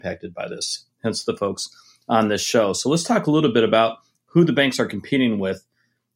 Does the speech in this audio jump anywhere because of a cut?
no; 0 cuts

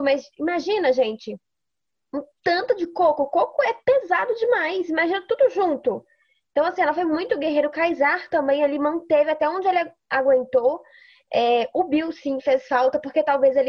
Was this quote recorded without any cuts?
yes; 0 cuts

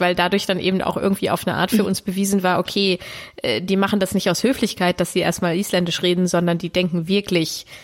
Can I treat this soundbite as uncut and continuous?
yes; 0 cuts

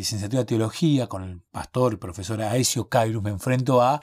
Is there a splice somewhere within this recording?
no; 0 cuts

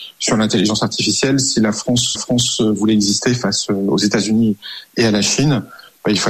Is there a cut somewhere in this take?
yes; 1 cut; at 2.1 s

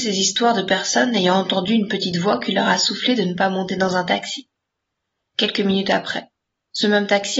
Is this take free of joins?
yes; 0 cuts

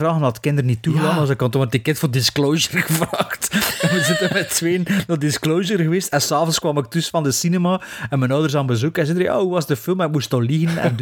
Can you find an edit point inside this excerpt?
no; 0 cuts

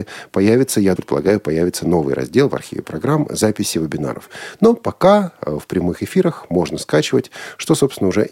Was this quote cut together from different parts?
yes; 1 cut; at 1.0 s

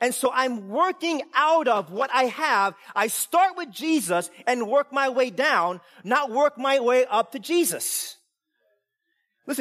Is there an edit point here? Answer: no; 0 cuts

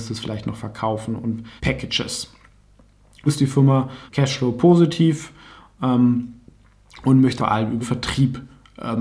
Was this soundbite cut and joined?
yes; 5 cuts; at 1.6 s, 3.3 s, 4.1 s, 7.4 s, 7.8 s

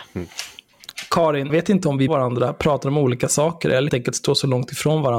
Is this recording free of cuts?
no; 3 cuts; at 1.5 s, 2.1 s, 3.9 s

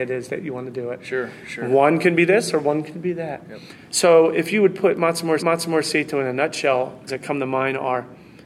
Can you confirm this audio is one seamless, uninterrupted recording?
no; 2 cuts; at 5.4 s, 7.1 s

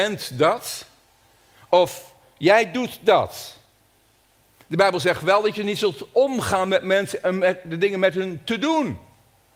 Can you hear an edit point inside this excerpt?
no; 0 cuts

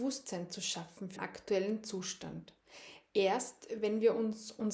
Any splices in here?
yes; 1 cut; at 1.2 s

